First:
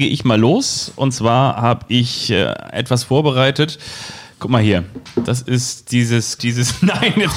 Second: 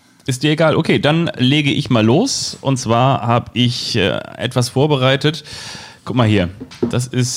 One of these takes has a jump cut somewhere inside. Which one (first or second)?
first